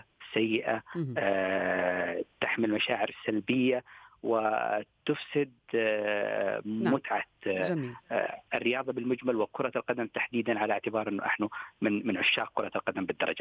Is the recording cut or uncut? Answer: uncut